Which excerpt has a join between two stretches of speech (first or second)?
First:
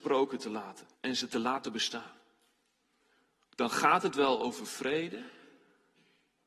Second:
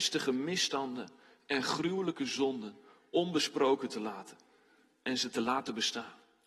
first